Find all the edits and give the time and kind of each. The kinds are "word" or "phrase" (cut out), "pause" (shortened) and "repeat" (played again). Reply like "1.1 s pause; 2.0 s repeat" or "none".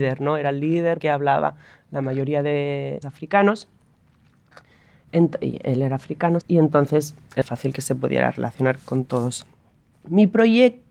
1.0 s word; 3.0 s word; 6.4 s word; 7.4 s word; 8.8 s word